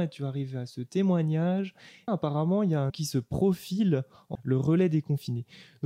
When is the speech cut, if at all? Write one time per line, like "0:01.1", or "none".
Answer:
0:02.1
0:02.9
0:04.3